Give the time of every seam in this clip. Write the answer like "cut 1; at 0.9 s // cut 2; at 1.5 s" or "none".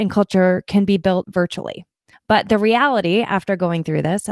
cut 1; at 1.2 s